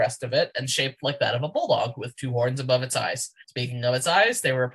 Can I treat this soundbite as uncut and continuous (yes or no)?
no